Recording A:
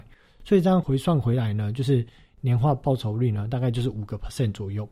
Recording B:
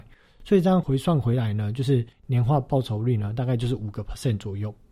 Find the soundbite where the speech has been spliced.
B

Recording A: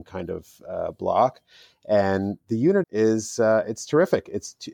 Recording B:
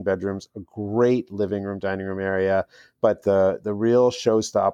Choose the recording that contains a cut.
A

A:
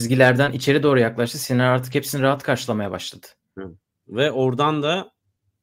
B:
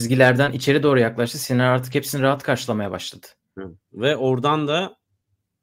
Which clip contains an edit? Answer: B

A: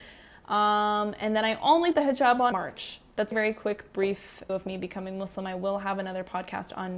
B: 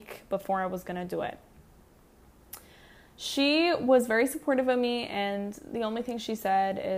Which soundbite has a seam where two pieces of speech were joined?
A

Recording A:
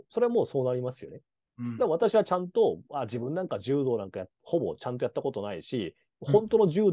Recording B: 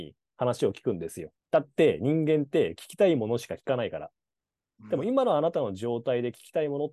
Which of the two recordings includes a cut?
B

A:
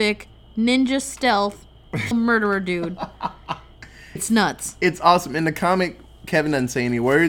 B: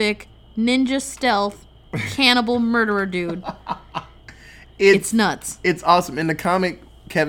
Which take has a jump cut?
A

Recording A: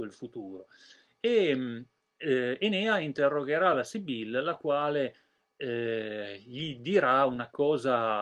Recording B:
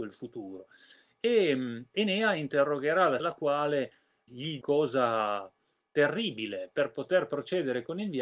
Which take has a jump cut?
B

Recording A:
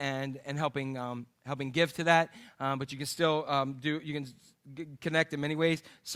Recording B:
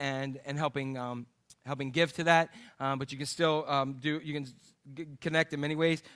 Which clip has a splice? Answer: A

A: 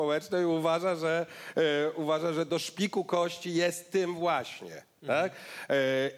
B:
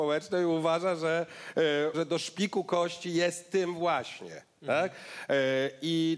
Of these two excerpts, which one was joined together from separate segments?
B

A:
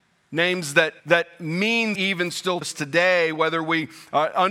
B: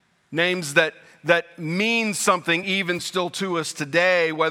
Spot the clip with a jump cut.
A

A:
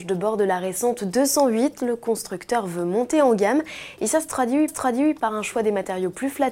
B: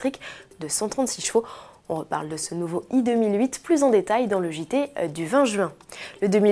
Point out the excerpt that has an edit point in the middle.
A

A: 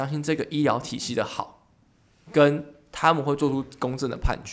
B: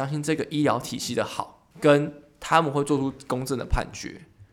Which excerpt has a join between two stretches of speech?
B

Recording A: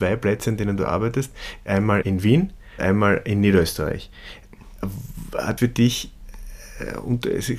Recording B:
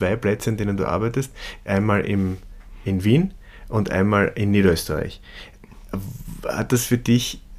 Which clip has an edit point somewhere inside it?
A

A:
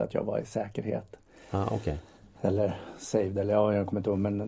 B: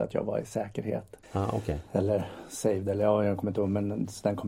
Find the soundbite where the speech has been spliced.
B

